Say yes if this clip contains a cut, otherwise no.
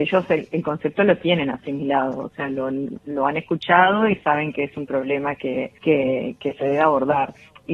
yes